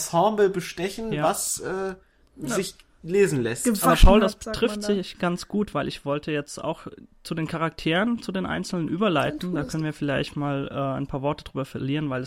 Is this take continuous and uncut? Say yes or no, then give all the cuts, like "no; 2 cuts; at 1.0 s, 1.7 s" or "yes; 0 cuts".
yes; 0 cuts